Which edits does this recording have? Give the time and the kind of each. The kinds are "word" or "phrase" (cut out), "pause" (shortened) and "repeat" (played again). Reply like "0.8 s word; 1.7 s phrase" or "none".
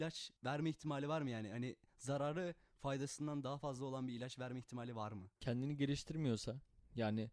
5.4 s pause